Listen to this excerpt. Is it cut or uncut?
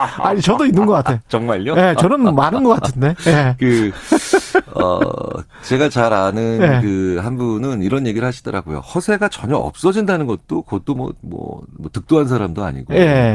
uncut